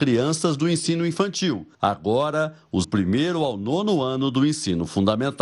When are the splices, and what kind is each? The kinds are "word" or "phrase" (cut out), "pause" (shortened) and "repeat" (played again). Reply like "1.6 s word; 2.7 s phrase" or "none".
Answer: 2.8 s phrase